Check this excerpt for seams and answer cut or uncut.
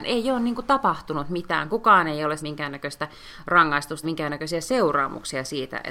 cut